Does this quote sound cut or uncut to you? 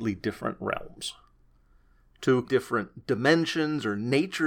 cut